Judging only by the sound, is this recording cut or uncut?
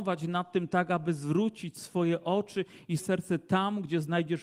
cut